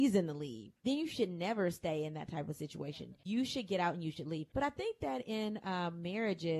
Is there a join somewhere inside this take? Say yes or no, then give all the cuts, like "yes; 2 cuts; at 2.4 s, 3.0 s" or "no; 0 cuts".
no; 0 cuts